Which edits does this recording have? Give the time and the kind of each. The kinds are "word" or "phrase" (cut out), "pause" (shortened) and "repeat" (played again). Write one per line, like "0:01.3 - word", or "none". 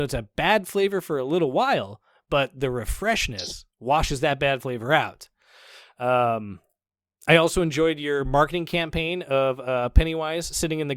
none